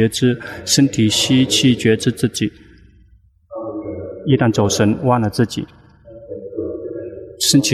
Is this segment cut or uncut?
uncut